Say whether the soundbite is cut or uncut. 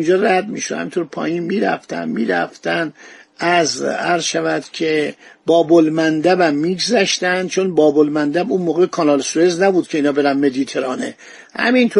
uncut